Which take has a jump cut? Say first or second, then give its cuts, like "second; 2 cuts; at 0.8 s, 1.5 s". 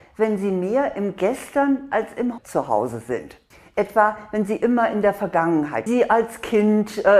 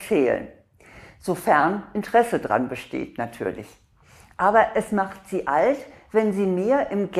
first; 3 cuts; at 2.4 s, 3.5 s, 5.9 s